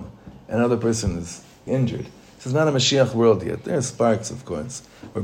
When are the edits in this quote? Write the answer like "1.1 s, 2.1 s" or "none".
1.7 s